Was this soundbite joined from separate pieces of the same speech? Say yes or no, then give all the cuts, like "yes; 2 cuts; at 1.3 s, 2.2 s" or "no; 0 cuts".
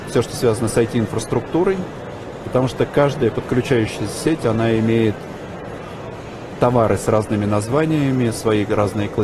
no; 0 cuts